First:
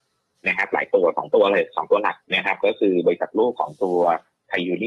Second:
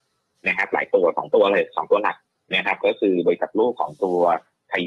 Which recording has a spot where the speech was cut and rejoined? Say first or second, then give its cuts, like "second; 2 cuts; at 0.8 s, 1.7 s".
first; 1 cut; at 2.2 s